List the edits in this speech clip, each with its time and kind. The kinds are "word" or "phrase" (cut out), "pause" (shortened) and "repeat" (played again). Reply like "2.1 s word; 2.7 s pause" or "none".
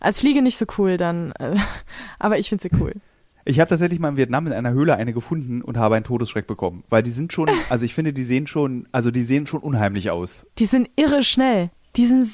3.3 s pause